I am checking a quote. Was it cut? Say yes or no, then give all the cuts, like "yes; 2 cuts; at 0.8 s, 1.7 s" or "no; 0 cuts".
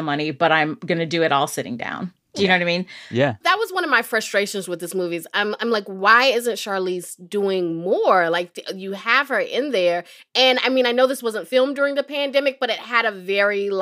no; 0 cuts